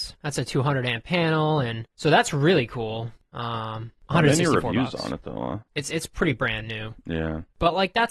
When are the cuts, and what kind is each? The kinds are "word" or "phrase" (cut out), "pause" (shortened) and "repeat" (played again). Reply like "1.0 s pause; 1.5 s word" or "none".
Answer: none